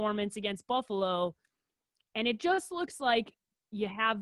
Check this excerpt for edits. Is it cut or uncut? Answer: uncut